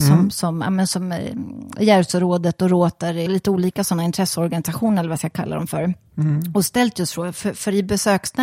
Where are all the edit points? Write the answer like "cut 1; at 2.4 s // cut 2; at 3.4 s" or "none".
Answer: cut 1; at 3.3 s